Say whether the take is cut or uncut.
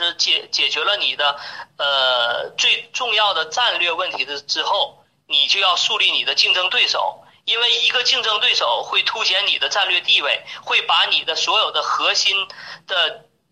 uncut